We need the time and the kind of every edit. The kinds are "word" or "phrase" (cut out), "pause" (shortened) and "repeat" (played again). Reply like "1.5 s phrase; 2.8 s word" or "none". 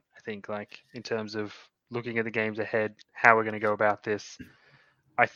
none